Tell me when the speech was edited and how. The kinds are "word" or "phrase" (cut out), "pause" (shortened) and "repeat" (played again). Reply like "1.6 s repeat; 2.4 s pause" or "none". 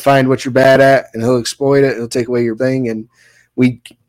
2.6 s word